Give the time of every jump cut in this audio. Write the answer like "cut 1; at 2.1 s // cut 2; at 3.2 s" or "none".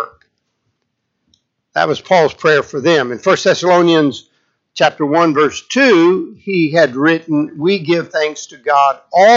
none